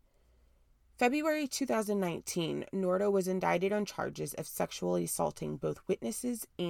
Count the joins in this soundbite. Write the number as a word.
zero